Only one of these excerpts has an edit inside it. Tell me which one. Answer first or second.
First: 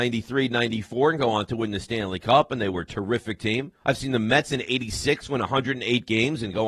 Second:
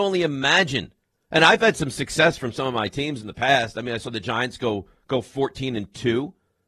first